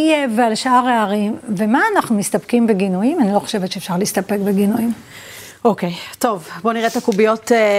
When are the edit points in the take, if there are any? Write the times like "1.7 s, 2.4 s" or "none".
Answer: none